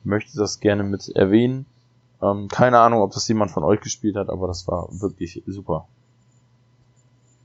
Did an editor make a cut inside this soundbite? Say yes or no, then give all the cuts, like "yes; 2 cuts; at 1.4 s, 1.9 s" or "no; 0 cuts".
no; 0 cuts